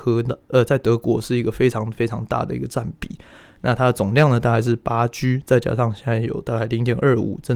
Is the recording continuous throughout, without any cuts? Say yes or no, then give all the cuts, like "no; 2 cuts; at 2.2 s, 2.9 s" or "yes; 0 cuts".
yes; 0 cuts